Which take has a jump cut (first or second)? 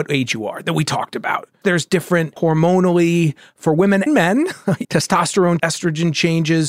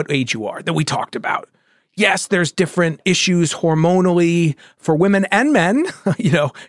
first